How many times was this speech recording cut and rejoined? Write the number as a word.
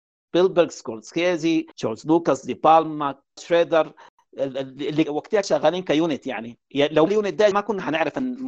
six